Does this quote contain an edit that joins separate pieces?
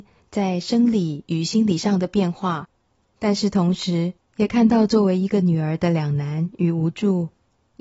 no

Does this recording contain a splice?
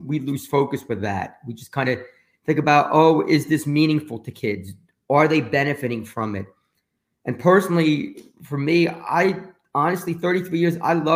no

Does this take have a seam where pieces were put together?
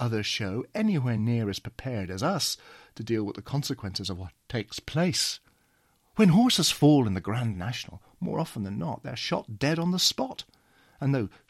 no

